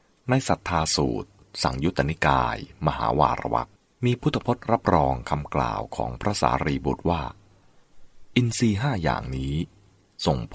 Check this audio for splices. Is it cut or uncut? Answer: cut